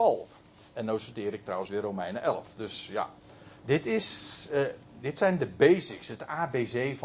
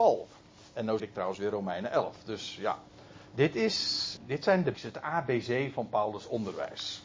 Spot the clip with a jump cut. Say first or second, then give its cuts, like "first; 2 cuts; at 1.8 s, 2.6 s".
second; 3 cuts; at 1.0 s, 4.2 s, 4.7 s